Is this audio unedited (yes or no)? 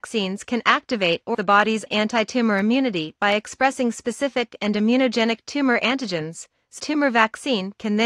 no